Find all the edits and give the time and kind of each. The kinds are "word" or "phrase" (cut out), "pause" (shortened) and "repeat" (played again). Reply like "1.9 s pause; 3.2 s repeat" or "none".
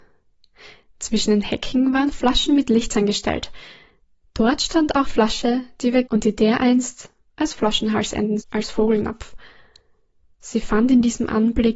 5.0 s word; 6.1 s word; 8.4 s word